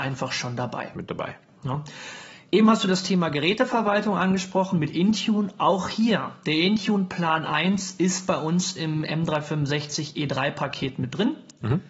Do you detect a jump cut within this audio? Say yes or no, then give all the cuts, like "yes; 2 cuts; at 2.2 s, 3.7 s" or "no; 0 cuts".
no; 0 cuts